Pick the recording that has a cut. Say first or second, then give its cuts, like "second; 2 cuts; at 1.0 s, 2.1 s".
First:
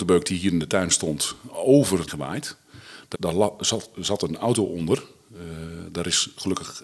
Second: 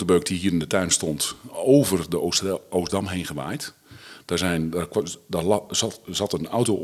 first; 2 cuts; at 2.1 s, 3.1 s